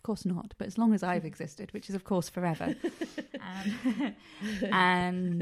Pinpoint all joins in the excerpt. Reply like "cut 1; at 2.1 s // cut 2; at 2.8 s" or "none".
none

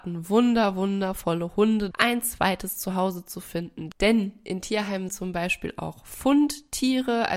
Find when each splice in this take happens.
cut 1; at 1.9 s // cut 2; at 5.1 s

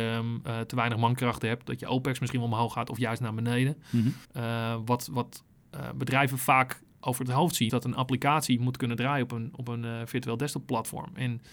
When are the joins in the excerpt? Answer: cut 1; at 4.2 s // cut 2; at 6.9 s // cut 3; at 7.7 s

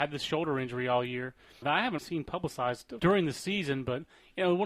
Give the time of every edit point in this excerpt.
cut 1; at 1.6 s // cut 2; at 2.0 s // cut 3; at 3.0 s

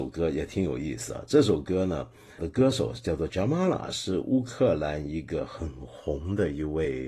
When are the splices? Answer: cut 1; at 2.4 s // cut 2; at 3.3 s

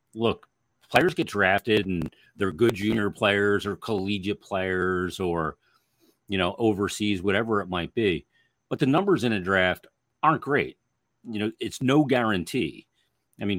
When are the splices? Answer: none

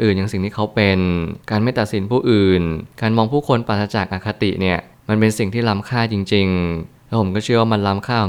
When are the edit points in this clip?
cut 1; at 1.4 s // cut 2; at 2.9 s

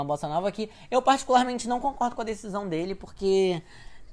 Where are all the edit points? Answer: none

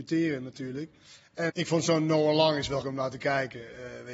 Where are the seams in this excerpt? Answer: cut 1; at 1.5 s // cut 2; at 2.8 s

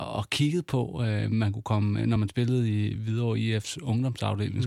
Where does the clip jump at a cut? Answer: none

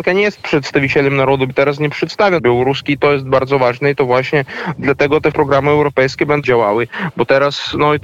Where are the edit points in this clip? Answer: cut 1; at 1.5 s // cut 2; at 2.4 s // cut 3; at 5.3 s // cut 4; at 6.4 s

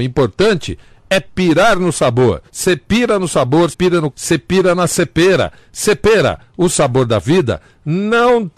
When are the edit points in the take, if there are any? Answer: cut 1; at 2.5 s // cut 2; at 3.7 s // cut 3; at 4.1 s

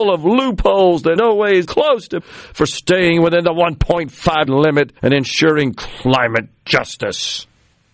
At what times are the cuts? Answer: cut 1; at 1.2 s // cut 2; at 1.6 s // cut 3; at 2.2 s // cut 4; at 4.5 s // cut 5; at 5.0 s

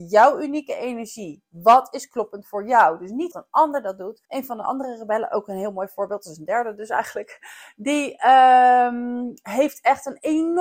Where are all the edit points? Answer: cut 1; at 3.3 s // cut 2; at 4.2 s

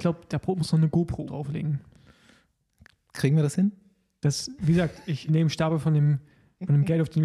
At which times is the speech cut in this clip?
cut 1; at 1.3 s // cut 2; at 5.3 s

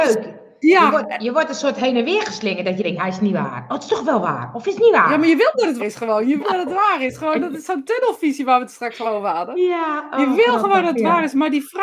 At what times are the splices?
cut 1; at 3.0 s // cut 2; at 5.8 s // cut 3; at 6.4 s // cut 4; at 9.0 s

